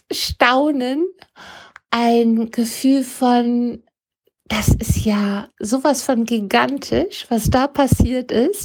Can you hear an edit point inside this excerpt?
no; 0 cuts

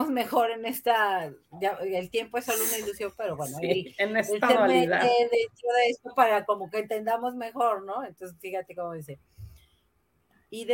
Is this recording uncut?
yes; 0 cuts

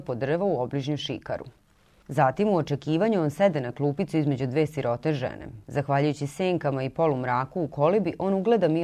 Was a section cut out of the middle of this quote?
yes; 1 cut; at 5.6 s

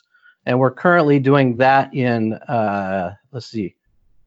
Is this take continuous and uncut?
yes; 0 cuts

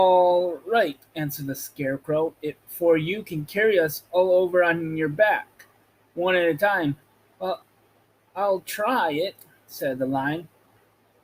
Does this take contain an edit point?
no; 0 cuts

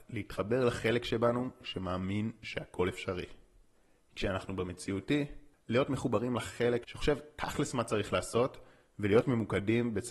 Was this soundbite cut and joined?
no; 0 cuts

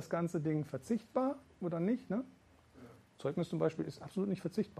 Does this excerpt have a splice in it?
no; 0 cuts

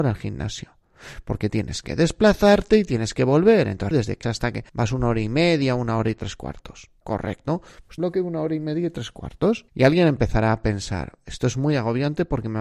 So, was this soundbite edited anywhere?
yes; 6 cuts; at 3.9 s, 4.2 s, 4.7 s, 7.0 s, 8.0 s, 9.7 s

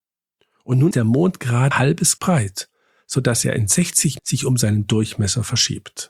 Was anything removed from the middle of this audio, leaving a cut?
yes; 4 cuts; at 0.9 s, 1.7 s, 2.2 s, 4.2 s

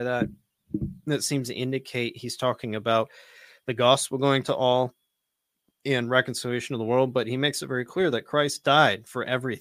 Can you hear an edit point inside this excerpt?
no; 0 cuts

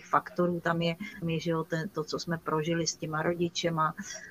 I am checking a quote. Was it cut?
yes; 1 cut; at 1.2 s

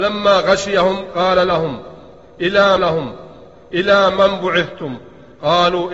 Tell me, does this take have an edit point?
yes; 1 cut; at 2.8 s

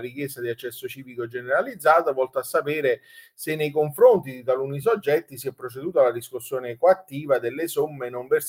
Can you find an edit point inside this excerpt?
no; 0 cuts

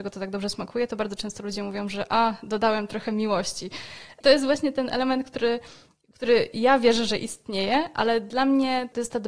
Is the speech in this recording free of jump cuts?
yes; 0 cuts

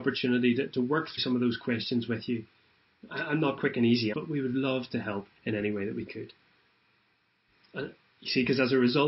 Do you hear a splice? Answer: yes; 4 cuts; at 1.2 s, 3.6 s, 4.1 s, 5.4 s

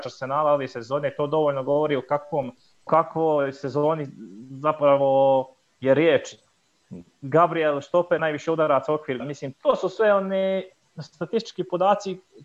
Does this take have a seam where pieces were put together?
yes; 4 cuts; at 2.9 s, 8.2 s, 9.2 s, 9.5 s

